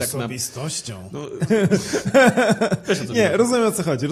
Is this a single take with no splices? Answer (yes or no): yes